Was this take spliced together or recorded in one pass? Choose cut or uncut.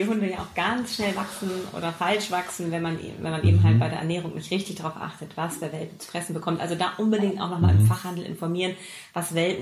uncut